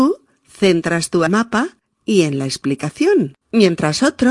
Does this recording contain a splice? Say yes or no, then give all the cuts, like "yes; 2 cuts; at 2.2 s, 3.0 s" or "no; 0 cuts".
yes; 2 cuts; at 1.3 s, 3.4 s